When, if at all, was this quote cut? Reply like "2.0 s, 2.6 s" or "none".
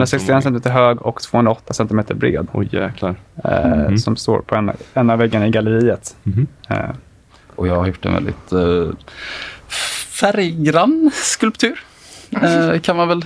none